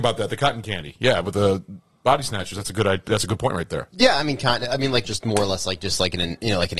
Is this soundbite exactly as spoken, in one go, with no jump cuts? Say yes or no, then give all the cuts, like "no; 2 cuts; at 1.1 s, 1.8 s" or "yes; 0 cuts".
no; 1 cut; at 5.0 s